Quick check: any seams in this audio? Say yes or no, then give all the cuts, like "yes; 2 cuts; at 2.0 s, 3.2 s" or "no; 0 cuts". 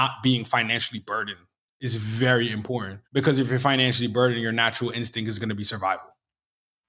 yes; 1 cut; at 3.0 s